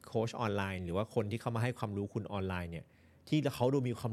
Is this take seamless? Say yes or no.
yes